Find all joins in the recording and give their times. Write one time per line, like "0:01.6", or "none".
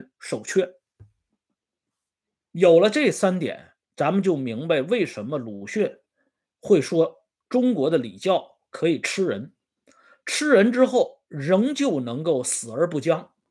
0:03.8